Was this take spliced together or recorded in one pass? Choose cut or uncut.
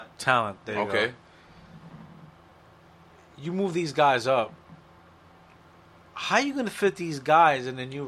uncut